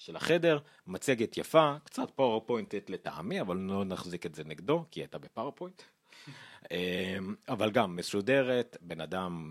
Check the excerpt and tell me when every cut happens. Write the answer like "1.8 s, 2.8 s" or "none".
none